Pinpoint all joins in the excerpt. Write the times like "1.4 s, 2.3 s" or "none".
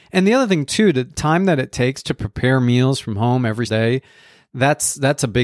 3.7 s